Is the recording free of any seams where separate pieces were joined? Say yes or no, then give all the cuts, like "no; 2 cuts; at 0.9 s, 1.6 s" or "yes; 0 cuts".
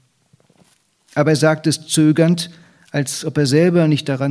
yes; 0 cuts